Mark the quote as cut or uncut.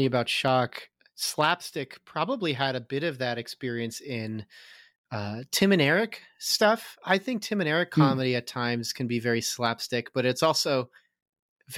uncut